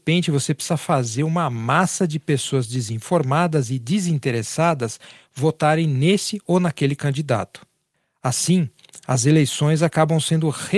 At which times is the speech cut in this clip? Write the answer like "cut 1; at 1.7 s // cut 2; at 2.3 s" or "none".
none